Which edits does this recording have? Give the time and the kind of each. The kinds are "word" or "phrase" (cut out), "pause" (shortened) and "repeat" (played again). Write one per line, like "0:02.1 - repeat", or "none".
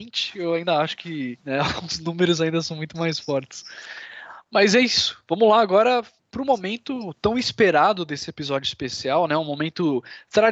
0:01.4 - pause
0:06.2 - pause